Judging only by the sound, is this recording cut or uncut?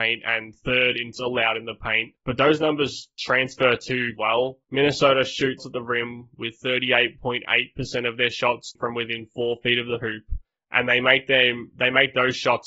cut